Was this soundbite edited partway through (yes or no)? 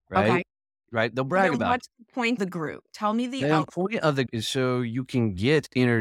yes